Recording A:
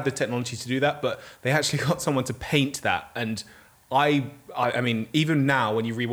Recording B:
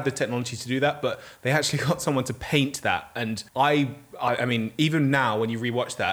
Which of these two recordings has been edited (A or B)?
B